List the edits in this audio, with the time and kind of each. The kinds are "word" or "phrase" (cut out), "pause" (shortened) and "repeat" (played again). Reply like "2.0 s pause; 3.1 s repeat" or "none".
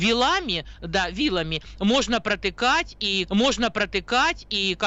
3.3 s repeat